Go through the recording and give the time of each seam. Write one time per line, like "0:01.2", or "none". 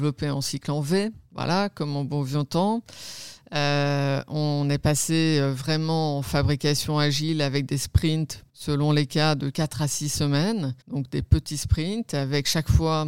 0:08.5
0:10.8